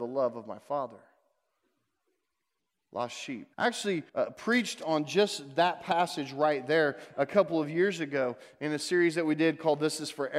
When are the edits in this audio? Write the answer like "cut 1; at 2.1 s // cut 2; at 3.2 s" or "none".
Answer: cut 1; at 3.5 s // cut 2; at 4.1 s